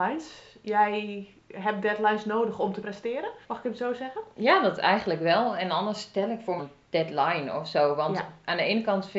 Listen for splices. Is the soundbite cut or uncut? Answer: cut